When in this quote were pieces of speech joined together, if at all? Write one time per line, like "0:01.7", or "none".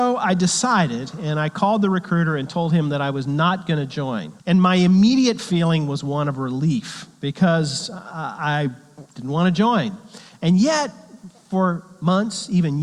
0:04.4